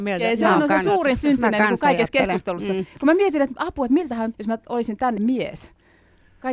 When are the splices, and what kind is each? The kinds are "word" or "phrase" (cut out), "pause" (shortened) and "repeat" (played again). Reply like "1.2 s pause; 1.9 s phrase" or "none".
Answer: 4.3 s word; 5.2 s word